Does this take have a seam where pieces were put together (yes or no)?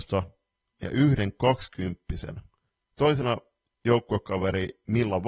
no